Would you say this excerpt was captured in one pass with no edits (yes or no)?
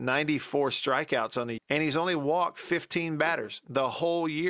no